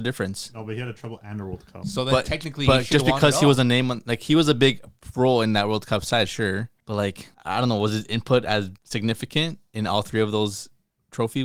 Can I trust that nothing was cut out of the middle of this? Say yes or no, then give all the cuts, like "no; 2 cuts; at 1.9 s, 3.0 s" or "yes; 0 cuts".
no; 3 cuts; at 6.8 s, 7.3 s, 8.8 s